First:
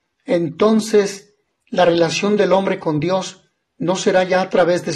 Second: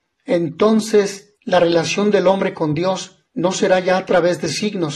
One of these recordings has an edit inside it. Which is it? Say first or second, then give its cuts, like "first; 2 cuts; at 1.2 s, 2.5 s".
second; 2 cuts; at 1.4 s, 3.3 s